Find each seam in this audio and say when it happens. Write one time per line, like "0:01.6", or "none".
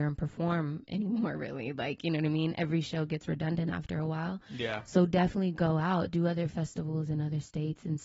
none